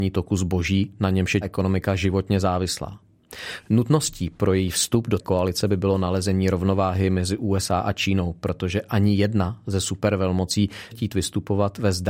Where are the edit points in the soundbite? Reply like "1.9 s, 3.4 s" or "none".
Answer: 1.4 s, 5.2 s, 10.9 s